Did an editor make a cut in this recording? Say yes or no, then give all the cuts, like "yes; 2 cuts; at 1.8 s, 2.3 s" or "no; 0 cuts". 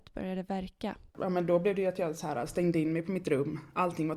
yes; 1 cut; at 1.1 s